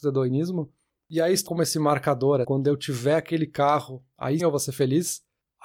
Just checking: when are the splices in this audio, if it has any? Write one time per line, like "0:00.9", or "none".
0:01.5
0:02.4
0:04.4